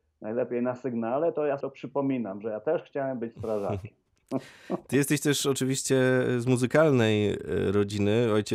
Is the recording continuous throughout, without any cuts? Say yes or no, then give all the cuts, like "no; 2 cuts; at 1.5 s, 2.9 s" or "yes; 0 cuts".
no; 1 cut; at 1.6 s